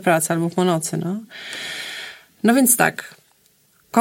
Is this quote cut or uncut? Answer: uncut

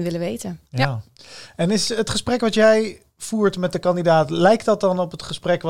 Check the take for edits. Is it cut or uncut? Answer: uncut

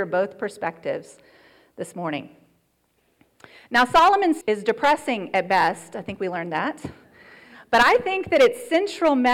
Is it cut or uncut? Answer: cut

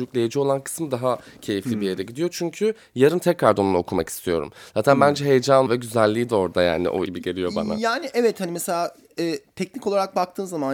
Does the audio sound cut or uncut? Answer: cut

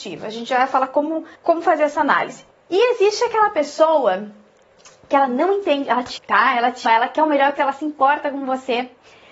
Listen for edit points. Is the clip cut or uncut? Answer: cut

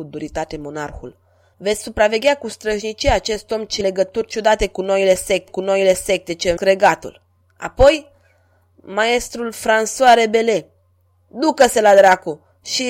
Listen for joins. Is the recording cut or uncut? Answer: cut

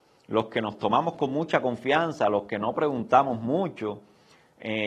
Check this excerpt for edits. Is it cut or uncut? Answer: uncut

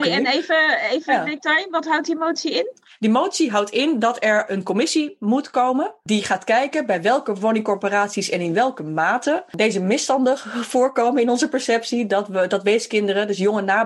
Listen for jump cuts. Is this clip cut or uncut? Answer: uncut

